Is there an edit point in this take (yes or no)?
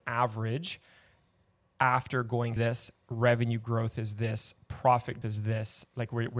yes